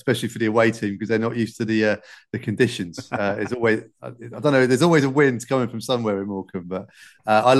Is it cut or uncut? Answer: uncut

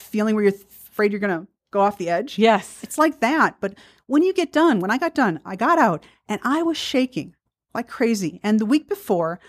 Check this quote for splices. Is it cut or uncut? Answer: uncut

